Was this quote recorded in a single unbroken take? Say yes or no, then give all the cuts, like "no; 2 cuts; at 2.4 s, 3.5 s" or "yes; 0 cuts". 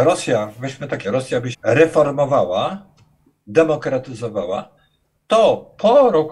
no; 2 cuts; at 1.0 s, 1.5 s